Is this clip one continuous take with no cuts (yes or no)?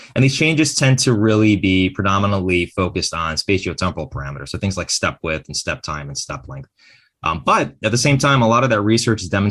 yes